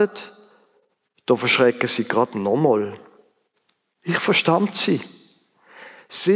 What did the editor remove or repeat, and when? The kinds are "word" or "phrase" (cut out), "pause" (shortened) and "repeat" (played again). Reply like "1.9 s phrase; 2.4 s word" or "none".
none